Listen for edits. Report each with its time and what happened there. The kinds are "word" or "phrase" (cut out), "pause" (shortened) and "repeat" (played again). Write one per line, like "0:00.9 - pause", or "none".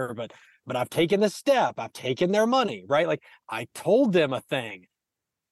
none